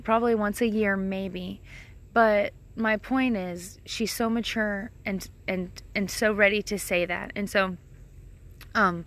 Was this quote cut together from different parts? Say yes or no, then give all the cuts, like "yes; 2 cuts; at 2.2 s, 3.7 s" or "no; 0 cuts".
no; 0 cuts